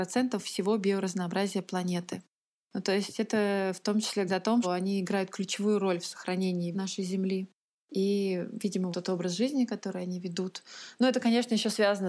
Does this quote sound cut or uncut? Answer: cut